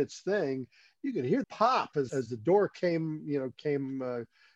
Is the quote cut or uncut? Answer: cut